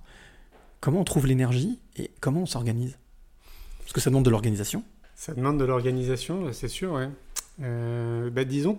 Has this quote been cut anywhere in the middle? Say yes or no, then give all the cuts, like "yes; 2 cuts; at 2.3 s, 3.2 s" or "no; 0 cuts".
no; 0 cuts